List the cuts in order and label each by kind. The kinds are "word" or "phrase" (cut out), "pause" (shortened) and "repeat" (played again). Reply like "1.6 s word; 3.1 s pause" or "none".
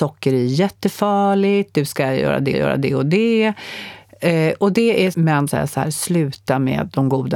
2.5 s repeat; 5.1 s phrase; 5.5 s phrase